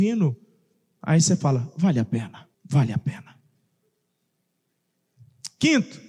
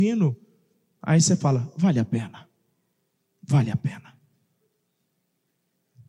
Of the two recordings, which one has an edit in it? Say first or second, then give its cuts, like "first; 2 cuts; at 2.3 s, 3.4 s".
first; 1 cut; at 2.5 s